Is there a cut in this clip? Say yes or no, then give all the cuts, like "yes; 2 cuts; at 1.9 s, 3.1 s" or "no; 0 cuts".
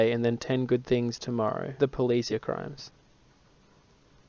yes; 2 cuts; at 1.8 s, 2.3 s